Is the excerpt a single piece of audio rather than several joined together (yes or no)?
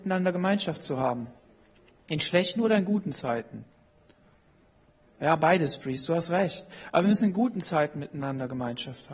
yes